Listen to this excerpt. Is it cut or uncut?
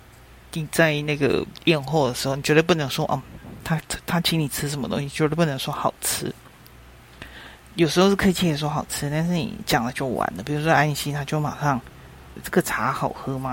cut